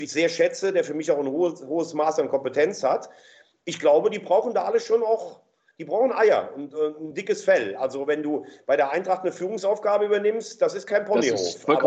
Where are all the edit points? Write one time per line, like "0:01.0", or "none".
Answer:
none